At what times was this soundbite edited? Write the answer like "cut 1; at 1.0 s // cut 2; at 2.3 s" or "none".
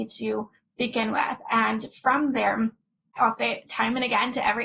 none